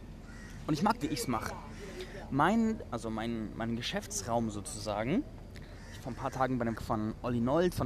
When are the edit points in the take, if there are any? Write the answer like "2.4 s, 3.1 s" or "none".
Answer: 1.0 s, 2.9 s, 6.0 s, 6.8 s